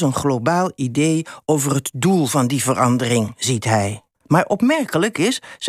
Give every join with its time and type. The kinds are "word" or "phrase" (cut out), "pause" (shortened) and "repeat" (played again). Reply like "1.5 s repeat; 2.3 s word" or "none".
4.1 s pause